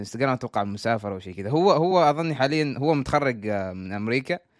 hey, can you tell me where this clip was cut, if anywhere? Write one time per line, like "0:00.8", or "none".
none